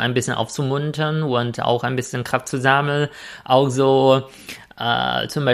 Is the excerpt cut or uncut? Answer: uncut